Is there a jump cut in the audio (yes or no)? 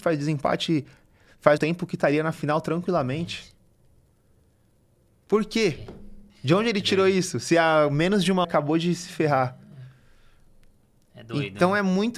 yes